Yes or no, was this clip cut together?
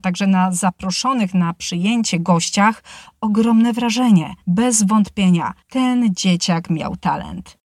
yes